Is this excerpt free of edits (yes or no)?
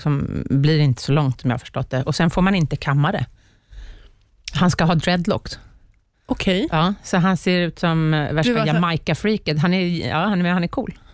yes